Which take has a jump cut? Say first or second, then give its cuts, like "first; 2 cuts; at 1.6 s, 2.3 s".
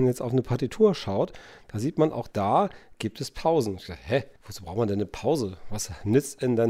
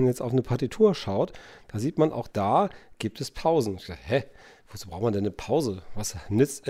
first; 1 cut; at 4.4 s